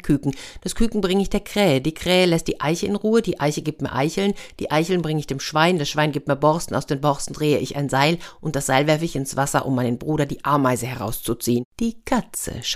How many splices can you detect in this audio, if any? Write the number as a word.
one